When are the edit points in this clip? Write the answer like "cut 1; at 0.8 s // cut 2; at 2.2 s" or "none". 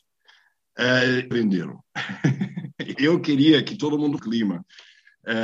cut 1; at 1.3 s // cut 2; at 2.9 s // cut 3; at 4.2 s